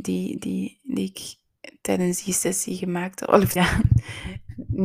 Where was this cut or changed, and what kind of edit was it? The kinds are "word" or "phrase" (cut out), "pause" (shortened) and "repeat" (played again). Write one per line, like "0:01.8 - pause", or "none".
0:03.6 - word